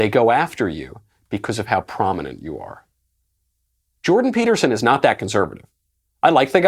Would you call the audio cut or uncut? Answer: uncut